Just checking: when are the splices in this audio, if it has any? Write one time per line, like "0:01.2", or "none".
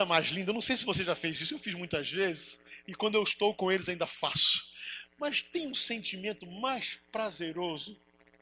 0:02.7